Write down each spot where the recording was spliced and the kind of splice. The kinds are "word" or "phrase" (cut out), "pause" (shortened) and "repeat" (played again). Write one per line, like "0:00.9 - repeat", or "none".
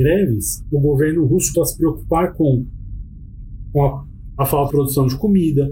0:01.5 - word
0:04.3 - word
0:04.7 - word

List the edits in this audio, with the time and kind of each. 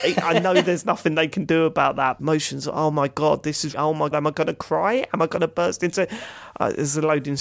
0:02.2 - phrase
0:03.7 - word
0:04.1 - word

